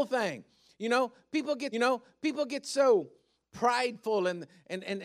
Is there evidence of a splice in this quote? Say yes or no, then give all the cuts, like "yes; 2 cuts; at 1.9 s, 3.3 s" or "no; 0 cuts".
yes; 1 cut; at 1.7 s